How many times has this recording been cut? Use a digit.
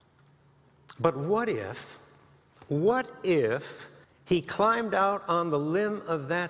2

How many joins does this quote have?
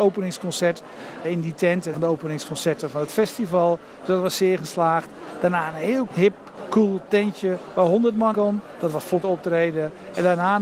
5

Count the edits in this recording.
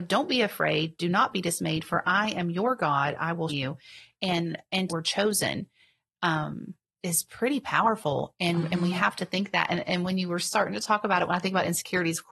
2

